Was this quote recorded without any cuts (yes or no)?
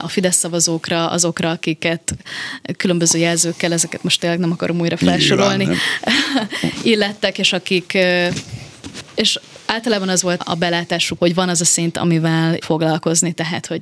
no